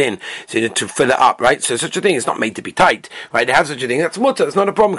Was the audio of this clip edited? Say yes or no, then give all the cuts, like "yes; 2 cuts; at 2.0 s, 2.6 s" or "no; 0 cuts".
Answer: no; 0 cuts